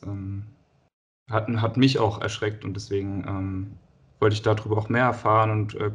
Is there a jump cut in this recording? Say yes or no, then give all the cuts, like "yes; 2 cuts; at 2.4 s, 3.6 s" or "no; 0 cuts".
no; 0 cuts